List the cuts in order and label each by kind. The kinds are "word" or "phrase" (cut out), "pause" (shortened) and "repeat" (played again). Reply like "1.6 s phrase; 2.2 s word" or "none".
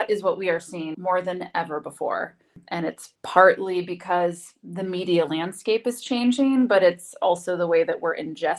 0.9 s word; 3.1 s pause